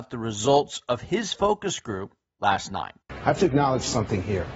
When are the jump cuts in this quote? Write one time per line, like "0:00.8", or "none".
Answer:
0:03.0